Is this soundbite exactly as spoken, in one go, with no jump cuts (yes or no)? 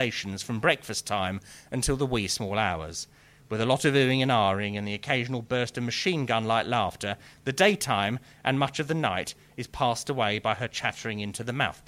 yes